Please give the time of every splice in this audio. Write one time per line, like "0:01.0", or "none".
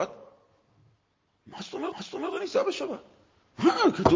0:01.9